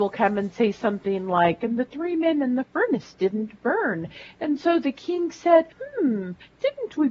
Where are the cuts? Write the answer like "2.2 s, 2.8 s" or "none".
5.7 s